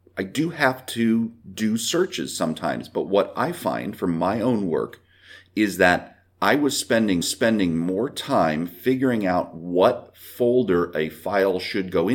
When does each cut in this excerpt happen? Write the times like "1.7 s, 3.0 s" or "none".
1.4 s, 7.2 s